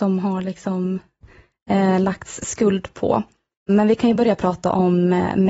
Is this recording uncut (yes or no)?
yes